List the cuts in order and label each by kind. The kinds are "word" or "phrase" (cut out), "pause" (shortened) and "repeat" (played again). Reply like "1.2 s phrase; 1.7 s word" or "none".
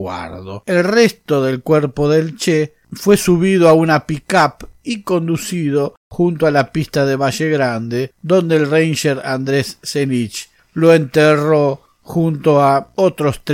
6.0 s pause